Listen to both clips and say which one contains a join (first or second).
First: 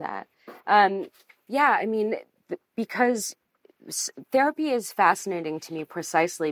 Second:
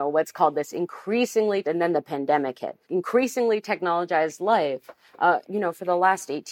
second